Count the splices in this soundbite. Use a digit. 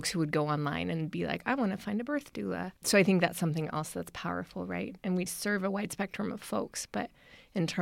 2